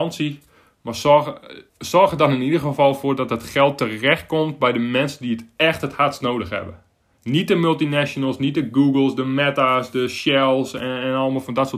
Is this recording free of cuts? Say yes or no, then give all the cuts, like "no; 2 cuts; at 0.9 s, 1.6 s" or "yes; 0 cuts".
no; 1 cut; at 1.7 s